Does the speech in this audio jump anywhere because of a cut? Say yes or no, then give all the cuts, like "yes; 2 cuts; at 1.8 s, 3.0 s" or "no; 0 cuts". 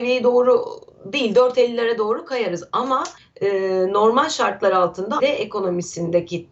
yes; 2 cuts; at 3.2 s, 5.2 s